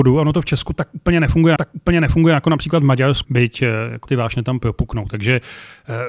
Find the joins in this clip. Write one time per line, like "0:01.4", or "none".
0:01.6
0:03.2
0:04.1